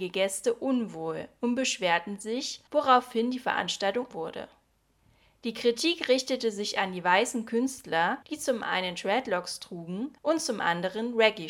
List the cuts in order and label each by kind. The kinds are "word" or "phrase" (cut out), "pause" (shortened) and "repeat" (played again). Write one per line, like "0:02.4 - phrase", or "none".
0:02.7 - pause
0:04.1 - word
0:08.2 - pause
0:10.2 - pause